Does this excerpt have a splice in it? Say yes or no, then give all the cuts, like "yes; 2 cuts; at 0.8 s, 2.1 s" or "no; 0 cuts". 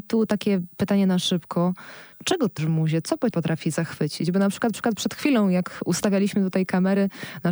yes; 4 cuts; at 2.1 s, 2.6 s, 3.3 s, 4.7 s